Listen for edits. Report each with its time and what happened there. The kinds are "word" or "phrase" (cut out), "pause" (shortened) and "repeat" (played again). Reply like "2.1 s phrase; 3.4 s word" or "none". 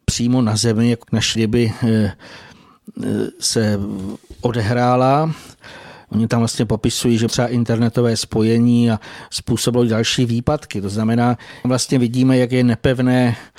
1.0 s word; 1.3 s word; 7.3 s phrase; 11.6 s phrase